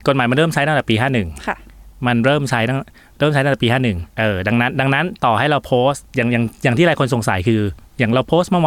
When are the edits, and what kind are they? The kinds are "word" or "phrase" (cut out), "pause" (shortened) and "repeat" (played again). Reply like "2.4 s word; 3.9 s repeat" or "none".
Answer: 4.1 s pause; 6.1 s pause